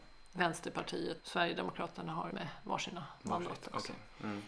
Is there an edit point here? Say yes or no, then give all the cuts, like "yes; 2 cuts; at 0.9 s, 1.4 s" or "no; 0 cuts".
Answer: yes; 2 cuts; at 1.2 s, 2.3 s